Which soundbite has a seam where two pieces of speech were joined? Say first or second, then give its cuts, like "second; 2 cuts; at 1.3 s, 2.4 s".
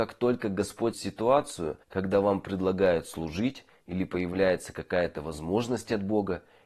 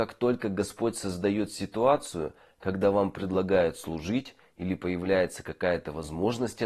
first; 2 cuts; at 0.9 s, 1.8 s